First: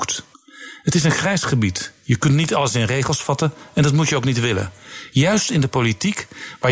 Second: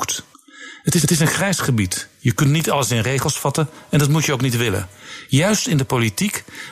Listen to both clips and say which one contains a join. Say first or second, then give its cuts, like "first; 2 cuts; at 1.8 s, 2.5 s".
second; 1 cut; at 1.0 s